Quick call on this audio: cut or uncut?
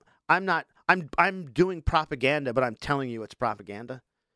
uncut